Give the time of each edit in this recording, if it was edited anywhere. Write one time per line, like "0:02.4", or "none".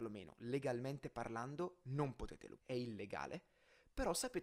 0:02.6